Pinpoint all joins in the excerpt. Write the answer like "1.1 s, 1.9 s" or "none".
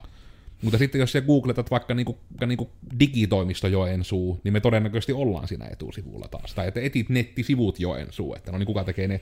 2.4 s